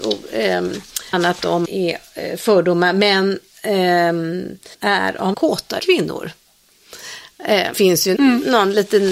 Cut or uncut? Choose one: cut